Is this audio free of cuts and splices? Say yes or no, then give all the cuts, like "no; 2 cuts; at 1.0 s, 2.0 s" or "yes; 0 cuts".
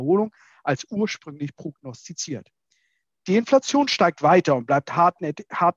yes; 0 cuts